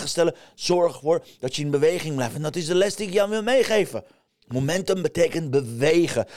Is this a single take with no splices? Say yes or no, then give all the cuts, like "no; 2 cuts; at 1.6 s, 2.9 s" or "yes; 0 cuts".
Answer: yes; 0 cuts